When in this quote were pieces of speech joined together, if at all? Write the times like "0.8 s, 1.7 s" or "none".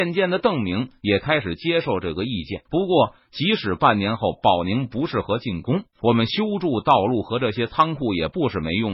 2.6 s, 5.9 s